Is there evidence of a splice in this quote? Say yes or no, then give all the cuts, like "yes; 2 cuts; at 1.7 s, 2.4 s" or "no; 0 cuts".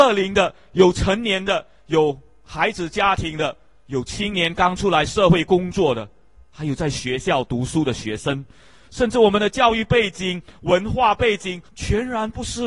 yes; 1 cut; at 11.7 s